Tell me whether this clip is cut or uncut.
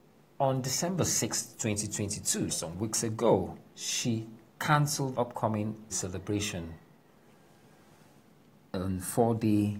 cut